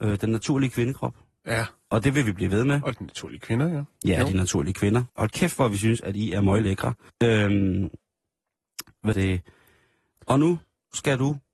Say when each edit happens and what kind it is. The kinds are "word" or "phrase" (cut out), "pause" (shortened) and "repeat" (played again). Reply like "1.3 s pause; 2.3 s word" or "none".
5.1 s pause; 7.1 s pause; 9.1 s word